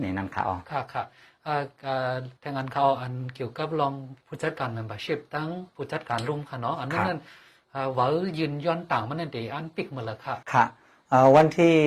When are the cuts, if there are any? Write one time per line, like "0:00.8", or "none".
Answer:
0:02.4
0:04.2
0:10.4